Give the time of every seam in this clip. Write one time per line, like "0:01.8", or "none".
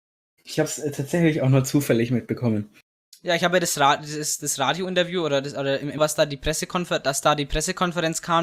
0:06.0